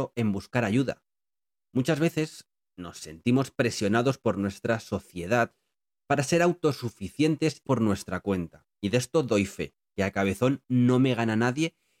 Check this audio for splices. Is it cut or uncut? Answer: cut